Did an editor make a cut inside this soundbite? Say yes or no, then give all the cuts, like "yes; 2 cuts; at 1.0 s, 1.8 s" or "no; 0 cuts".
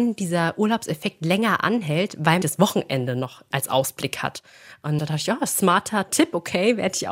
yes; 2 cuts; at 2.4 s, 5.0 s